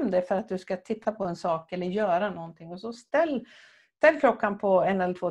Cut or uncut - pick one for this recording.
uncut